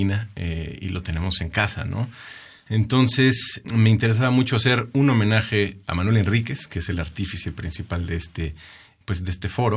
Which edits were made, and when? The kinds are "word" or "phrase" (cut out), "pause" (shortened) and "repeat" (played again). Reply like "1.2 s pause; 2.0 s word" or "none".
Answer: none

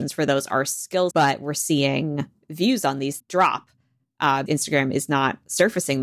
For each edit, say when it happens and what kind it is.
1.1 s word; 3.2 s word; 4.5 s word

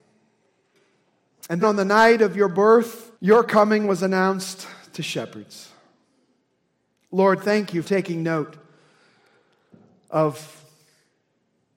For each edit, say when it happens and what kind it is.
1.6 s word; 3.1 s pause; 7.8 s word

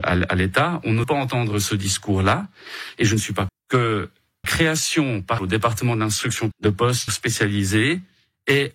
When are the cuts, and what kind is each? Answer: 1.0 s word; 3.5 s word; 4.4 s word; 5.4 s word; 6.5 s word; 7.1 s word

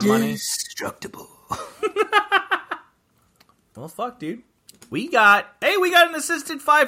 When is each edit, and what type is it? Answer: none

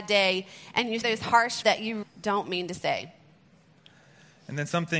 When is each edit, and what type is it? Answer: 1.0 s word; 1.6 s word; 2.0 s word

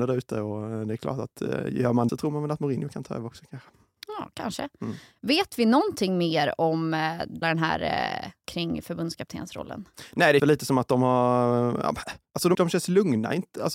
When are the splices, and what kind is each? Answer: 2.1 s word; 7.4 s word; 8.4 s word; 10.4 s word; 12.5 s word

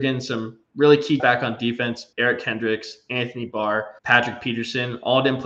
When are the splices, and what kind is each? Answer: 1.2 s word; 2.1 s pause; 4.0 s pause

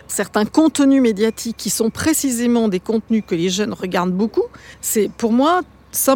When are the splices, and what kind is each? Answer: 4.7 s pause

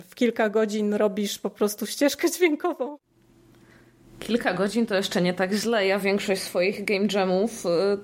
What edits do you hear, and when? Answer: none

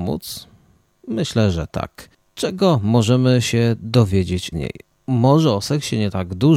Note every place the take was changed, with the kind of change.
4.5 s word

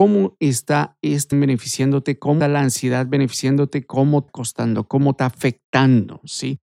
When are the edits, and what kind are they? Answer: 1.3 s word; 2.4 s word; 4.3 s word; 5.2 s word

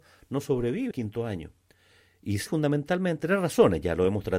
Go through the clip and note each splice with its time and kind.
0.9 s word; 2.5 s word; 3.2 s word

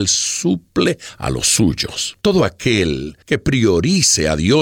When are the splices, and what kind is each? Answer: 2.2 s pause; 3.2 s pause

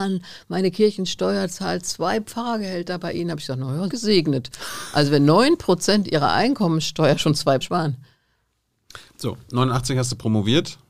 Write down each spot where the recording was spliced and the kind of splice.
3.9 s phrase; 7.6 s phrase

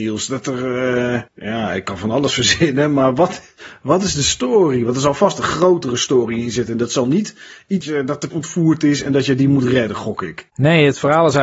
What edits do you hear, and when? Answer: 7.8 s phrase; 8.3 s word

